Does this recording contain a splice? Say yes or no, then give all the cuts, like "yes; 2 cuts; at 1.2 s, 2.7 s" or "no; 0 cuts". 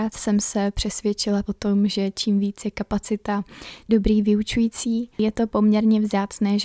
yes; 3 cuts; at 1.4 s, 3.9 s, 5.1 s